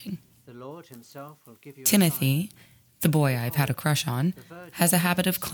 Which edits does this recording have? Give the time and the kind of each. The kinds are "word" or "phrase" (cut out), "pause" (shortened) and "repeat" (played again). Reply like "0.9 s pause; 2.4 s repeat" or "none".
none